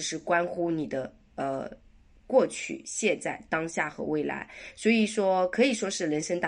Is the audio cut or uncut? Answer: uncut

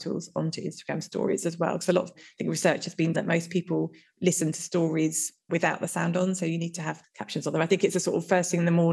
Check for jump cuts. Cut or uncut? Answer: cut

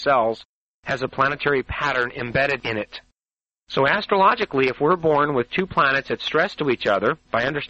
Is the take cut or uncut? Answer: uncut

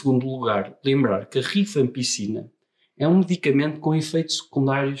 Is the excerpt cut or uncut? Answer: uncut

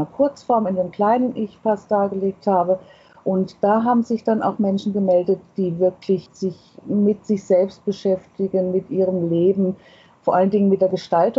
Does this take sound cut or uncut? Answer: uncut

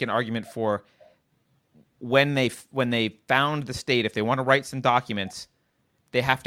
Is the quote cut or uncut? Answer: uncut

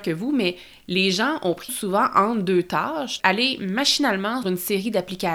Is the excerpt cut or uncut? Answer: cut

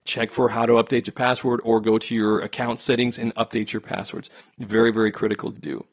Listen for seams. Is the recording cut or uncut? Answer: uncut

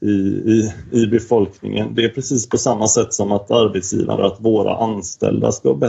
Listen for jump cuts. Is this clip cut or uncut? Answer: cut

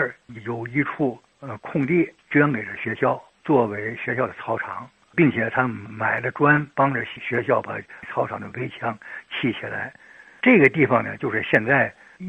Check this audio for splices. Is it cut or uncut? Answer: cut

